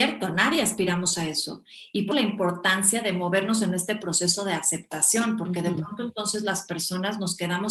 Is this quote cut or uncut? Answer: cut